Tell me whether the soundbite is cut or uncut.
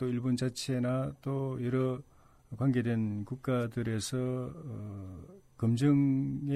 uncut